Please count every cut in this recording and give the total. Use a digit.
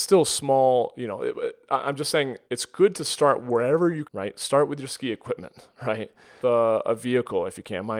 3